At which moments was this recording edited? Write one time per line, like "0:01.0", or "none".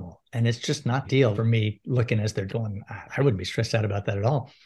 0:01.0
0:01.3
0:02.5
0:03.1